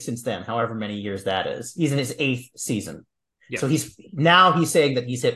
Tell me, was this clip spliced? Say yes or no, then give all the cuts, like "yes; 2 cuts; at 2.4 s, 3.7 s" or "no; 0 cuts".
no; 0 cuts